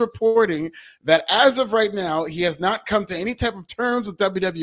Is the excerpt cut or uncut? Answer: uncut